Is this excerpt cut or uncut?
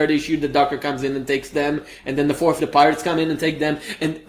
cut